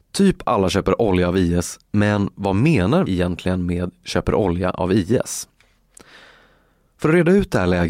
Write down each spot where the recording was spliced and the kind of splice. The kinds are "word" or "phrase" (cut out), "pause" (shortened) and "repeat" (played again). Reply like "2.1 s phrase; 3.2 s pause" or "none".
3.1 s word